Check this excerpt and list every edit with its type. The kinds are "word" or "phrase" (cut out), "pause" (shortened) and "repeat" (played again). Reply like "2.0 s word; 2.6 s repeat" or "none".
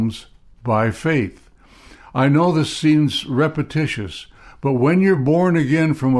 none